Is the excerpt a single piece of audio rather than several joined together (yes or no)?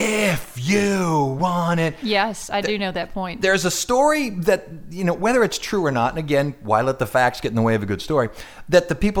yes